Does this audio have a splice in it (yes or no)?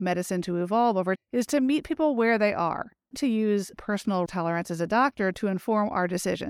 yes